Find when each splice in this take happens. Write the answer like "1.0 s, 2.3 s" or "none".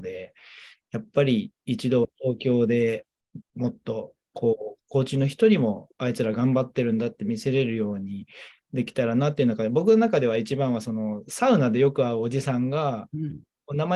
3.4 s, 4.8 s